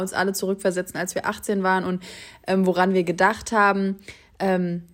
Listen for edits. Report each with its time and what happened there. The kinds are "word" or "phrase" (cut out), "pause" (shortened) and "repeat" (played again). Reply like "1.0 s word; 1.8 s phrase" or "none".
none